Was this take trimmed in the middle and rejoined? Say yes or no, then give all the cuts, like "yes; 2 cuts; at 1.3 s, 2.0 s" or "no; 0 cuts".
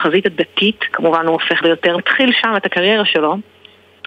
yes; 3 cuts; at 0.9 s, 1.6 s, 2.0 s